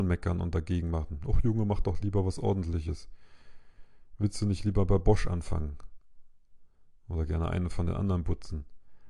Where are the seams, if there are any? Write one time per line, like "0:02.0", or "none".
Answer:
none